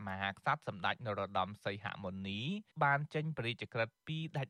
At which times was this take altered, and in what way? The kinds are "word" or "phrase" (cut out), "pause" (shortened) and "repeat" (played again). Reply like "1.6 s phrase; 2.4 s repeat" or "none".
2.7 s pause

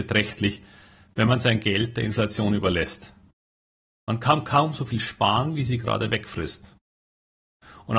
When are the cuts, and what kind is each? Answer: none

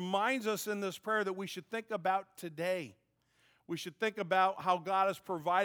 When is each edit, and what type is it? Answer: none

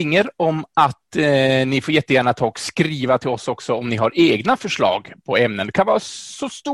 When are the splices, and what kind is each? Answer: none

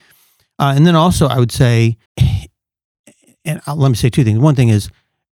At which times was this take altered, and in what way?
2.1 s pause

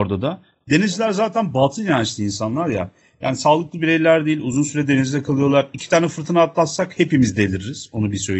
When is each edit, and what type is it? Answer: none

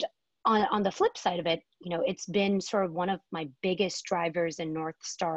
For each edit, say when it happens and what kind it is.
none

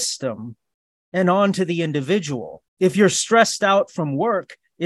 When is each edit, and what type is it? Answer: 2.7 s pause

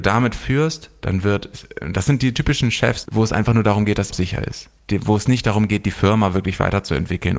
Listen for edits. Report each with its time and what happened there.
3.1 s phrase; 4.1 s phrase; 4.8 s pause

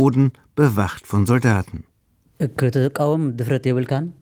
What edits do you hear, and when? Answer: none

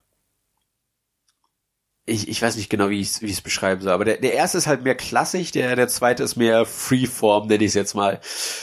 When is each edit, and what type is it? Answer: none

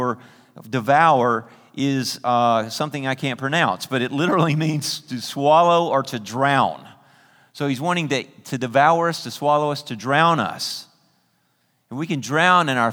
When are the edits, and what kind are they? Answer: none

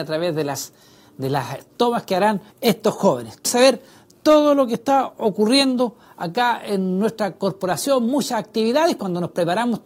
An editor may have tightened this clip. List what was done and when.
2.5 s pause; 3.5 s word

